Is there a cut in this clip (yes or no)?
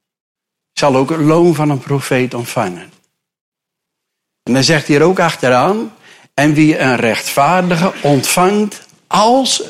no